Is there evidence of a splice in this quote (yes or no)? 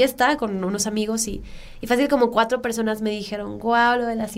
no